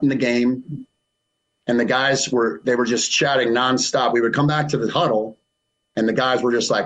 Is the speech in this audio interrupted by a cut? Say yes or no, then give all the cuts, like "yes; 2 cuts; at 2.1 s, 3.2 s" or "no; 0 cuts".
no; 0 cuts